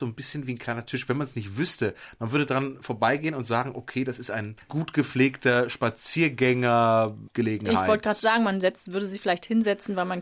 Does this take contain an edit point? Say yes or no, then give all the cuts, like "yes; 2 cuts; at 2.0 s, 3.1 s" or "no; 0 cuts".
yes; 2 cuts; at 4.7 s, 7.3 s